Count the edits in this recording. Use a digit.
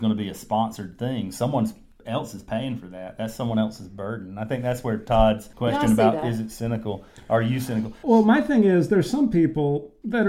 0